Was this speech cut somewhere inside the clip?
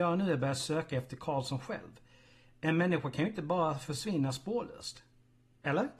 no; 0 cuts

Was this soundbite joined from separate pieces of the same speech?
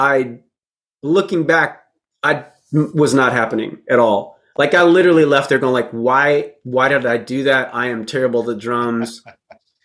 no; 0 cuts

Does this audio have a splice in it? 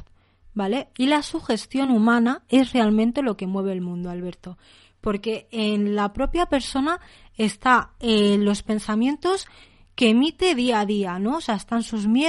no; 0 cuts

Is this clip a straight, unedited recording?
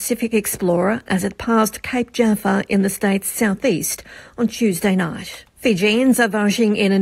no; 1 cut; at 5.5 s

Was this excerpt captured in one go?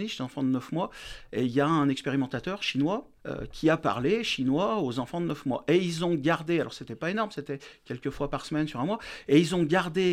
no; 1 cut; at 3.2 s

